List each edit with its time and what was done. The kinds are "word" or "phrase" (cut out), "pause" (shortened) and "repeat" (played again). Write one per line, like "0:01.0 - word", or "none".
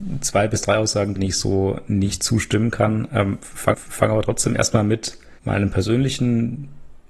0:01.2 - phrase
0:03.7 - repeat
0:05.4 - pause